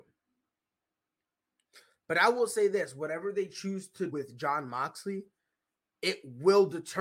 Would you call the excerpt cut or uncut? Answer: cut